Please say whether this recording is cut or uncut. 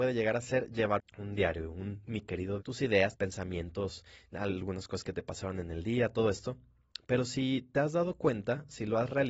cut